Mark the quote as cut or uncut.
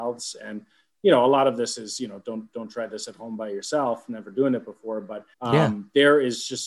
cut